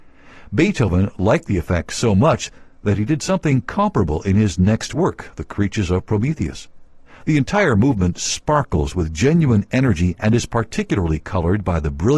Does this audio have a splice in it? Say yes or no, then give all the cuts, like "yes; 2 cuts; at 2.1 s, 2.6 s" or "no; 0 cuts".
no; 0 cuts